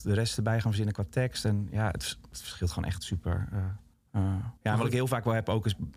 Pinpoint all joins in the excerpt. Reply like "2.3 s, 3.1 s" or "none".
3.9 s, 4.6 s